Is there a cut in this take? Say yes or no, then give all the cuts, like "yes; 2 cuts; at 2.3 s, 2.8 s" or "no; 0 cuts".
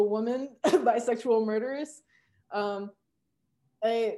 no; 0 cuts